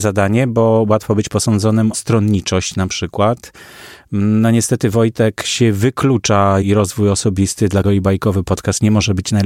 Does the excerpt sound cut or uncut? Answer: cut